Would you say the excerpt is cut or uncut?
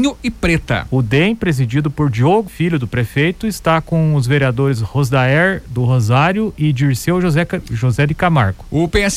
cut